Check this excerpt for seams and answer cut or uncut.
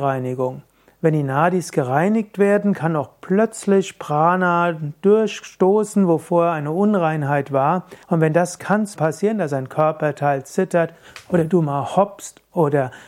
cut